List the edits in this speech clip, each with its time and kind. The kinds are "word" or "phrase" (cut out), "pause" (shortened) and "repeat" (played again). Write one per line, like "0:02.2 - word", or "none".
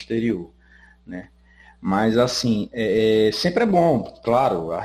none